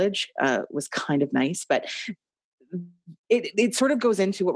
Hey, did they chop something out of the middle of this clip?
yes; 1 cut; at 3.2 s

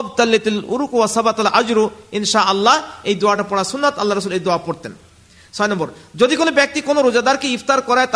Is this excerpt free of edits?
yes; 0 cuts

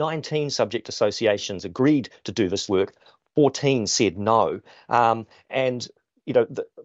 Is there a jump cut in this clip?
no; 0 cuts

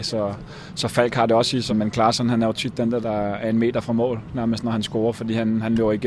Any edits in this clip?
yes; 2 cuts; at 1.7 s, 3.0 s

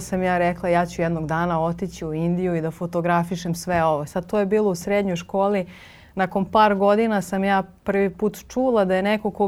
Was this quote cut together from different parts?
no; 0 cuts

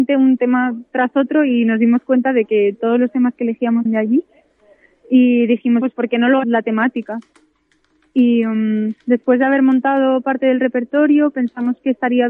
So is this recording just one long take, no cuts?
no; 4 cuts; at 3.9 s, 5.8 s, 6.4 s, 9.0 s

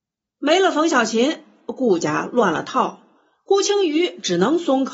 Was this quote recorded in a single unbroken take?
yes; 0 cuts

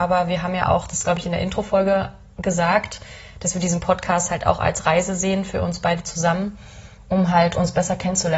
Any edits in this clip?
no; 0 cuts

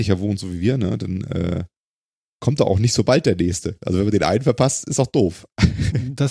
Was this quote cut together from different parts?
no; 0 cuts

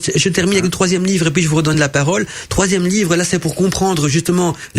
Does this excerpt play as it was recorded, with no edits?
yes; 0 cuts

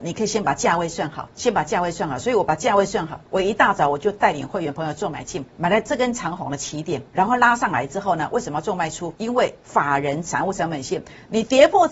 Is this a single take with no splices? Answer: no; 5 cuts; at 1.3 s, 3.3 s, 5.5 s, 7.1 s, 9.2 s

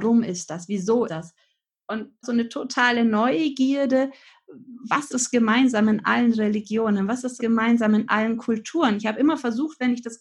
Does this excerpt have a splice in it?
yes; 4 cuts; at 1.1 s, 2.2 s, 5.1 s, 7.4 s

